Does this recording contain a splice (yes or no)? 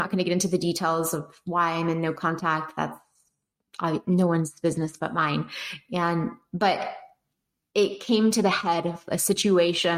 no